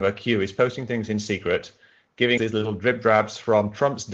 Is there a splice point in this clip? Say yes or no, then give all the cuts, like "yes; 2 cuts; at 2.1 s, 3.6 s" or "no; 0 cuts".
yes; 1 cut; at 2.4 s